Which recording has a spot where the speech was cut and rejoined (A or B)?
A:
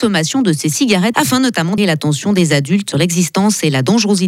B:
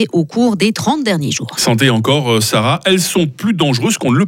A